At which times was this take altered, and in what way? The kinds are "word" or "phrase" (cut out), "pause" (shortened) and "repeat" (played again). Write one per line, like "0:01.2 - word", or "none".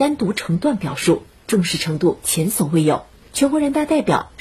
none